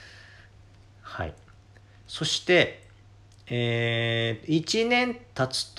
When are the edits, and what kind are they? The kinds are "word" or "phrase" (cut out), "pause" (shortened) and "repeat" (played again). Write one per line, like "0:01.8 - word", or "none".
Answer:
none